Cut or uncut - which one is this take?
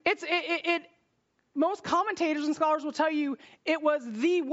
uncut